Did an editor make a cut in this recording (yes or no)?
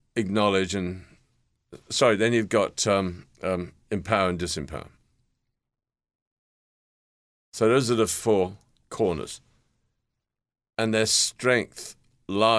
no